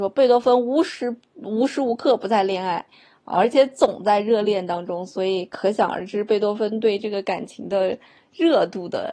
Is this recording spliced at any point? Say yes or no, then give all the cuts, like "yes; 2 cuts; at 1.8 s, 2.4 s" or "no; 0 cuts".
no; 0 cuts